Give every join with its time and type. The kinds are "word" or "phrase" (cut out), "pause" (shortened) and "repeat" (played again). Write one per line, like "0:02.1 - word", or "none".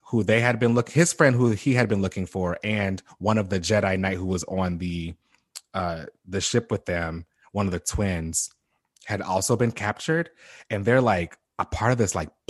none